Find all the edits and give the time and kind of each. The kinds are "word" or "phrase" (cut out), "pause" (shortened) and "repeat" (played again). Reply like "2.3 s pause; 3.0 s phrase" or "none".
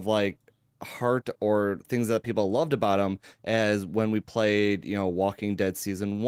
none